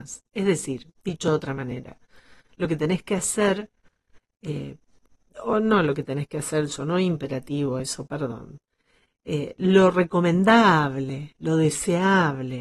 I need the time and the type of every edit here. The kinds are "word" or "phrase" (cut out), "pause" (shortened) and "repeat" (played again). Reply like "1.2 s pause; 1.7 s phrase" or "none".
none